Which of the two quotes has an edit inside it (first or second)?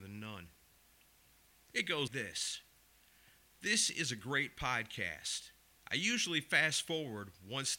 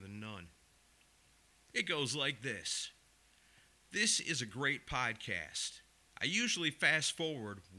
first